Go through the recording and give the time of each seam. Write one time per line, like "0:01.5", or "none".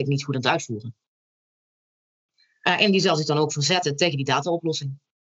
none